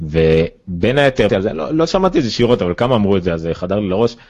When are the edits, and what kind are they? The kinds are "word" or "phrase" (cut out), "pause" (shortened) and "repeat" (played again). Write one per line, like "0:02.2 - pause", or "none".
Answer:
0:01.3 - phrase